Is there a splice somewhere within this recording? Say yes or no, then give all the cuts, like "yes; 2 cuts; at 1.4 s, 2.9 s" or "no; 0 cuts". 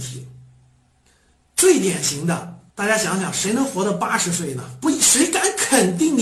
yes; 1 cut; at 2.7 s